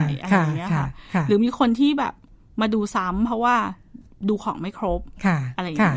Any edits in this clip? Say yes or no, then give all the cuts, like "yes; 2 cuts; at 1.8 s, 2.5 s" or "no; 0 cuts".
no; 0 cuts